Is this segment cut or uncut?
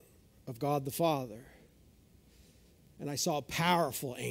uncut